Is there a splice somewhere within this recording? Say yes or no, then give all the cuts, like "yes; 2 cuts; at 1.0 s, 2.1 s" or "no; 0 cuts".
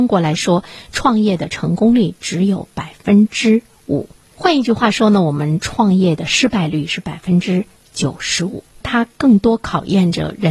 no; 0 cuts